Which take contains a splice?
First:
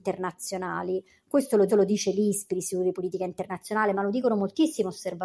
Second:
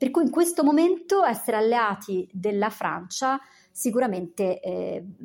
first; 1 cut; at 1.7 s

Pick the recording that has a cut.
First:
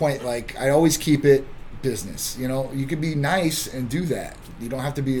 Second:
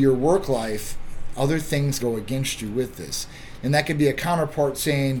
second; 1 cut; at 2.0 s

